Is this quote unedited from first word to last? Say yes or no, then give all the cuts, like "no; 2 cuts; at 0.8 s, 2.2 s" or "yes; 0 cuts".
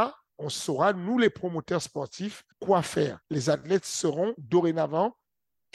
no; 2 cuts; at 2.5 s, 3.2 s